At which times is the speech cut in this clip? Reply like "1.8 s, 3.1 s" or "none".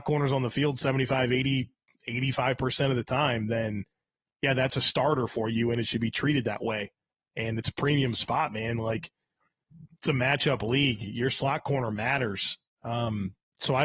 none